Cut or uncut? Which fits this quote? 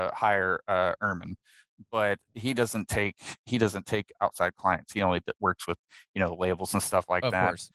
cut